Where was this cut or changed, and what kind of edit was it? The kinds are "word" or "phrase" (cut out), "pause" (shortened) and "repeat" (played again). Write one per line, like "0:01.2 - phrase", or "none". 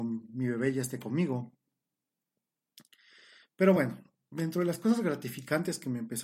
none